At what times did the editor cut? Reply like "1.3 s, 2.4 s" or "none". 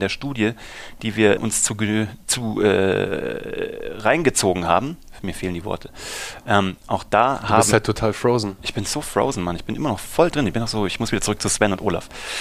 1.4 s